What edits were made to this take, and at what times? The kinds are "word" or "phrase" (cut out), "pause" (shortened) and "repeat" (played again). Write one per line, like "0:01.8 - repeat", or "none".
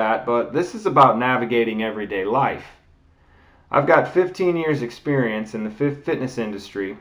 none